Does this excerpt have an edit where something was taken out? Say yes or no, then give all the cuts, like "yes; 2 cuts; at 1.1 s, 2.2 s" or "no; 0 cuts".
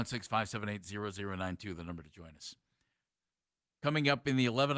no; 0 cuts